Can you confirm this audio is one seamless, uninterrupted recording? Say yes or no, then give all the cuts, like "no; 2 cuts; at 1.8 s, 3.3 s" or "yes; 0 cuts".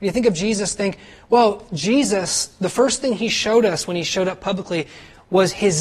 yes; 0 cuts